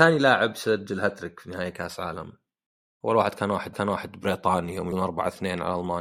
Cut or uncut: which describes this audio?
cut